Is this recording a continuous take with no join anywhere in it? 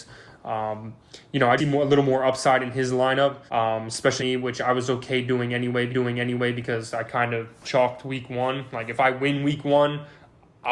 no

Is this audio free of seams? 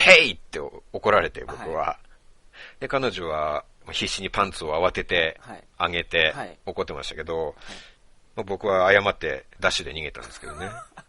yes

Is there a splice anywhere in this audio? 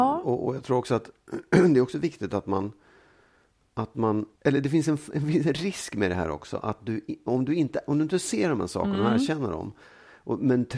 yes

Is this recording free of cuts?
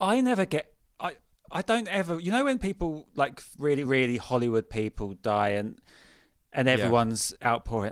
yes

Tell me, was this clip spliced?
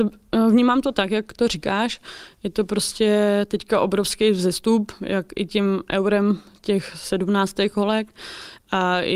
no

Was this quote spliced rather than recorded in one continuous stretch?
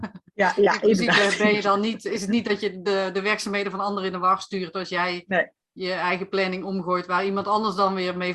no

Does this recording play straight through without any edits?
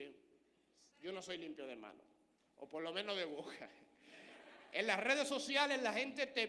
yes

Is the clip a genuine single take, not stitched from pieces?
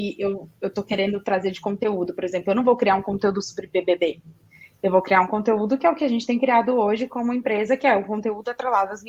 yes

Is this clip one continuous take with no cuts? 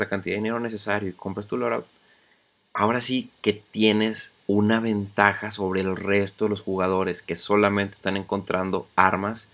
yes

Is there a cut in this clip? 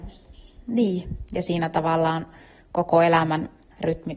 no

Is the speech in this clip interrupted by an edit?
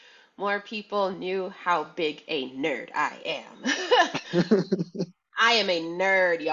no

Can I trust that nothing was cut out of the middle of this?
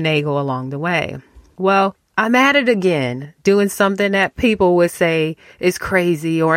yes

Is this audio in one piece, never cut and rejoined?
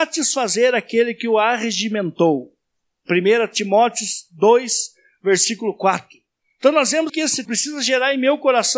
no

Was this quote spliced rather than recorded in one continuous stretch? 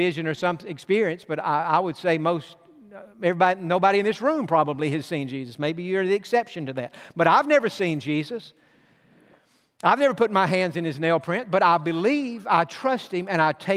no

